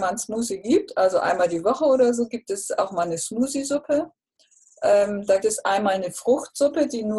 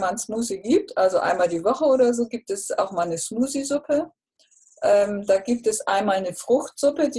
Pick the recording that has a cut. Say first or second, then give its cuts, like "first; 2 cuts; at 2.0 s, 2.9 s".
first; 1 cut; at 5.4 s